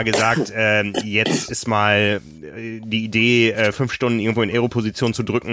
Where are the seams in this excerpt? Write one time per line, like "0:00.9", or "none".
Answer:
none

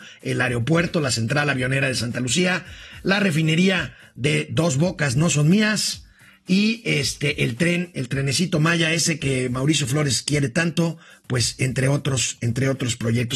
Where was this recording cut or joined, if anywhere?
none

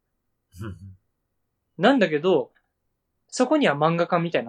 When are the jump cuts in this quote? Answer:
none

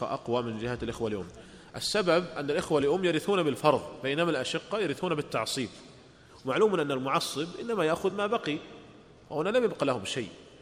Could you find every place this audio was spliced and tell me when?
none

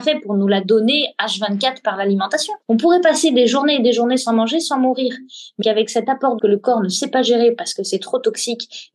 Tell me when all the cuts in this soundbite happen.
0:02.6
0:05.6
0:06.4

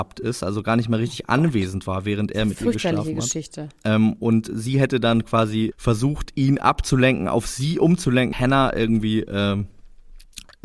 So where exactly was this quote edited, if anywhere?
0:05.7
0:08.3

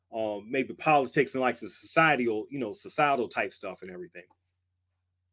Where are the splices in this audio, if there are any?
none

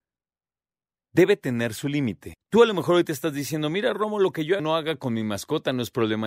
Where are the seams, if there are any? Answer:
0:02.4
0:04.6

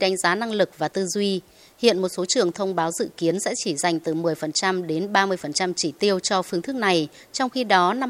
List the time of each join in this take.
none

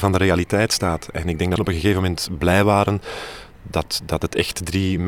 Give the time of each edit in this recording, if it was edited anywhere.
0:01.6

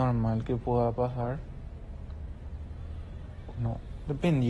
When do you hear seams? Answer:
0:03.6

